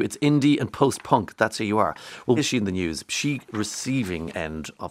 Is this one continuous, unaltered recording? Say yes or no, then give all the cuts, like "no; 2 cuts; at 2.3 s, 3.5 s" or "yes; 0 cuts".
no; 2 cuts; at 2.4 s, 3.5 s